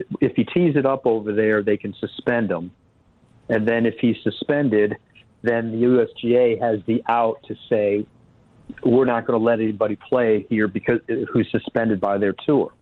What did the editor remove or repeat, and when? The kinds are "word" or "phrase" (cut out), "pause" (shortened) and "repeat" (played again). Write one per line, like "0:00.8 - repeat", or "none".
none